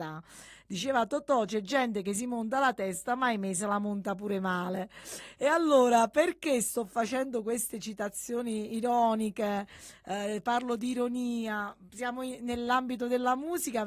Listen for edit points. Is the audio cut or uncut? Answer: uncut